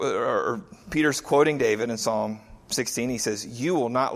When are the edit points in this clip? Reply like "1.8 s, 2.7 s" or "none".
none